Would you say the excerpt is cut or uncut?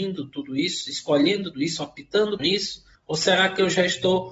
cut